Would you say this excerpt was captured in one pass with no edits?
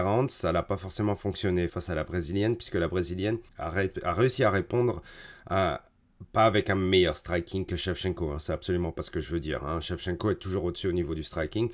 no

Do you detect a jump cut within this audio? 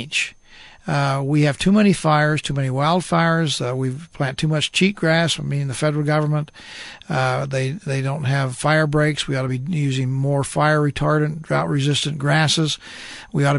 no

